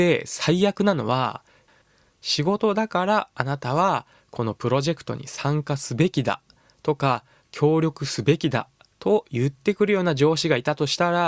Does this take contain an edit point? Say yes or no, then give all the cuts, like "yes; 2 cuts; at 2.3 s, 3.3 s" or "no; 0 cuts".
no; 0 cuts